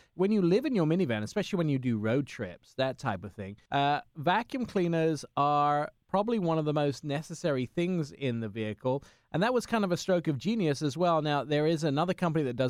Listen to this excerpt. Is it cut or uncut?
uncut